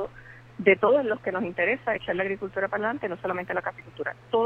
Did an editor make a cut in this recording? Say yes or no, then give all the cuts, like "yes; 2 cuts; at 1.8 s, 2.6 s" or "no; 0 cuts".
no; 0 cuts